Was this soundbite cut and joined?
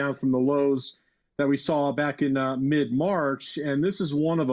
no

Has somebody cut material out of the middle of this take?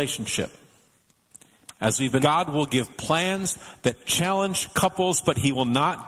yes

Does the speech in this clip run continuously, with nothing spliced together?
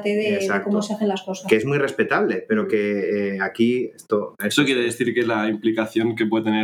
yes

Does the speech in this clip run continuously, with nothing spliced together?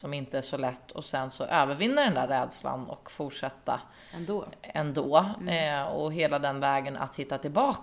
yes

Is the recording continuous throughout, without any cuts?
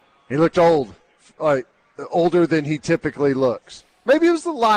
yes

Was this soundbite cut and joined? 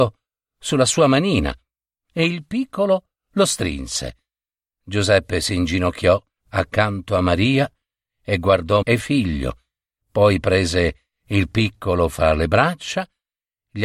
yes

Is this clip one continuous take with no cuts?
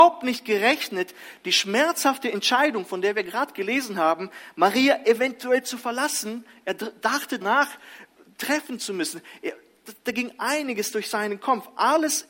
no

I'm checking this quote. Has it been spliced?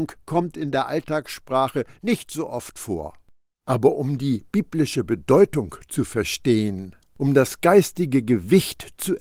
no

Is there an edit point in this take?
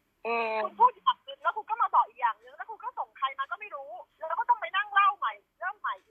yes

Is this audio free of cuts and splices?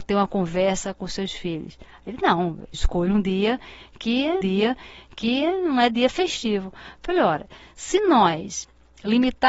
no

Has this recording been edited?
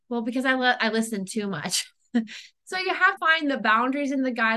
yes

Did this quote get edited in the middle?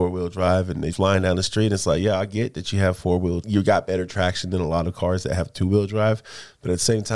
yes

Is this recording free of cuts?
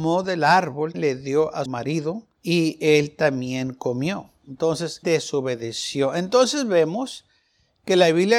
no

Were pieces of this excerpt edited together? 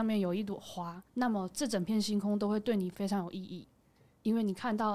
yes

